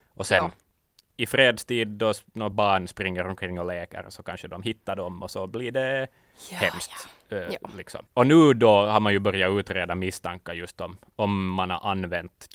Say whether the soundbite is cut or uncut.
uncut